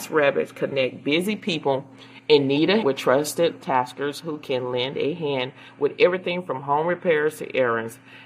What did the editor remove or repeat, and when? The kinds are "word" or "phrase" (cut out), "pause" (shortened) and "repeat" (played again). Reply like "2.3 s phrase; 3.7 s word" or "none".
2.8 s word; 3.6 s word